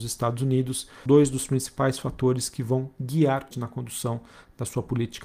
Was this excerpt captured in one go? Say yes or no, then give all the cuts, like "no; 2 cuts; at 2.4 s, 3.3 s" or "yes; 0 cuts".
no; 2 cuts; at 1.1 s, 3.5 s